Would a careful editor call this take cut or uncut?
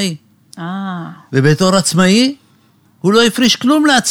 uncut